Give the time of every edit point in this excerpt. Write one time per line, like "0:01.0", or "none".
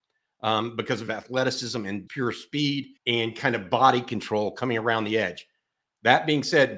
0:01.1
0:02.1
0:03.0